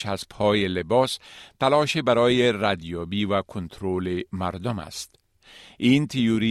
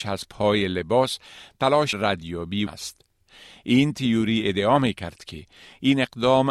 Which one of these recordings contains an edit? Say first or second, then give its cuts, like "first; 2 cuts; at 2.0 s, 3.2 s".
second; 2 cuts; at 1.9 s, 2.7 s